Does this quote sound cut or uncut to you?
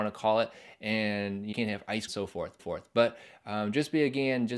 cut